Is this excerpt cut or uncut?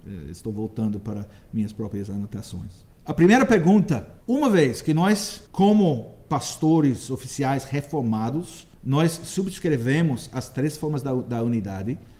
cut